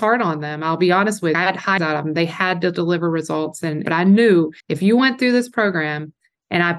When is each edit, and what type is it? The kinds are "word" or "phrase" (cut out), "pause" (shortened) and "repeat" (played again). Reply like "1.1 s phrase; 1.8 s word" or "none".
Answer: 1.3 s phrase; 1.8 s word; 3.9 s phrase; 4.6 s pause